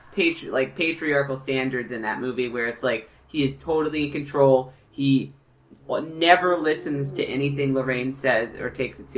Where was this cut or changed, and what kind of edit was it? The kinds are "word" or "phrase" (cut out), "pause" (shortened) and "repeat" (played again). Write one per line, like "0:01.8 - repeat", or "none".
none